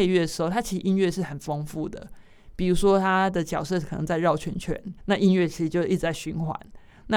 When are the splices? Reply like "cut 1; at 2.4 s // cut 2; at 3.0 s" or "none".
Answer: cut 1; at 5.0 s